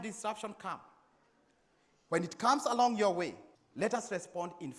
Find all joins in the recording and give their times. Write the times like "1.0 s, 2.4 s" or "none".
3.5 s